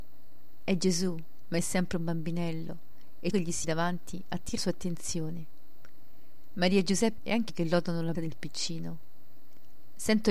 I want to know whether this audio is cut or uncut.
cut